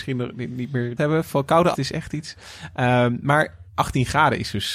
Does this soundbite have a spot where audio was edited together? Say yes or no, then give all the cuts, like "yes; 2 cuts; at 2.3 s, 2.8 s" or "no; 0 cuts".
yes; 3 cuts; at 1.0 s, 1.7 s, 3.7 s